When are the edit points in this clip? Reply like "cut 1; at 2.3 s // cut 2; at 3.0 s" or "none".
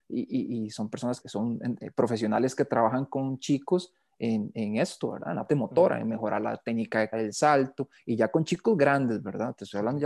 cut 1; at 1.2 s // cut 2; at 5.5 s // cut 3; at 7.1 s